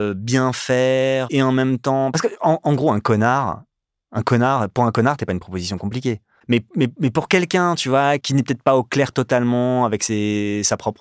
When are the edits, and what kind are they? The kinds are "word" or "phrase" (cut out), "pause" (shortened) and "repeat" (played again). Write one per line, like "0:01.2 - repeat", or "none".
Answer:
none